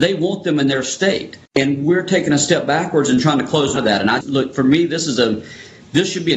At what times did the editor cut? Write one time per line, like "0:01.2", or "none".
0:01.5
0:03.8
0:04.2

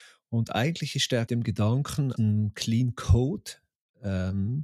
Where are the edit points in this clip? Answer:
0:01.3
0:02.2

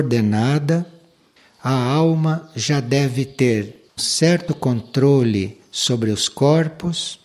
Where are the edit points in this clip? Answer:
0:04.0

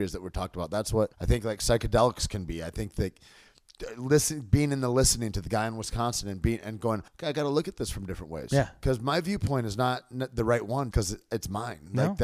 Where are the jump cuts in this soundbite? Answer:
0:01.1
0:07.1
0:10.9

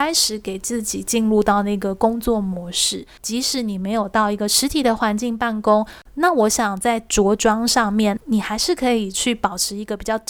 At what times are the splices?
0:08.2

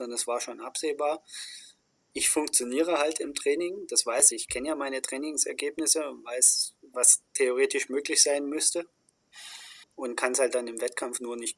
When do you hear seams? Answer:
0:04.3
0:09.8

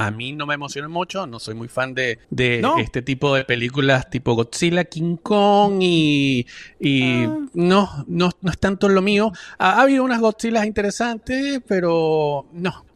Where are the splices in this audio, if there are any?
0:02.2

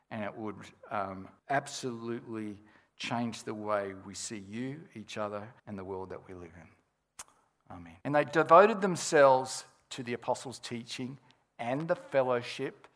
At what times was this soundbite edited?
0:01.4
0:05.6
0:08.0

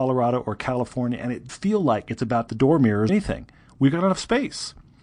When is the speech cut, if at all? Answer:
0:01.5
0:02.5
0:03.1

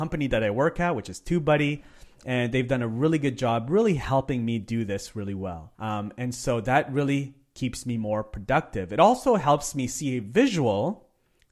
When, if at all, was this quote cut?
0:05.7

